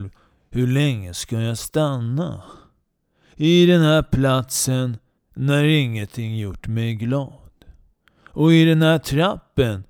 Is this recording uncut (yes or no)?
no